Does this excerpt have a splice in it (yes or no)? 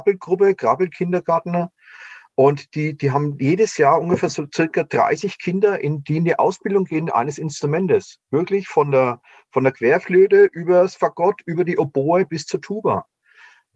no